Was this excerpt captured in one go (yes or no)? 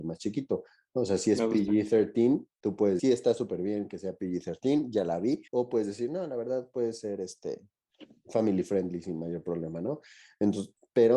no